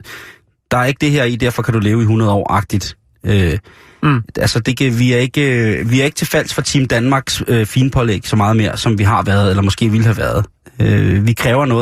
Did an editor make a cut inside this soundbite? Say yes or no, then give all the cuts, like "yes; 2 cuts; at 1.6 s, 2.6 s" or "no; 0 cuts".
yes; 1 cut; at 4.7 s